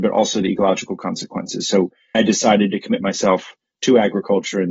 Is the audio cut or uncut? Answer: cut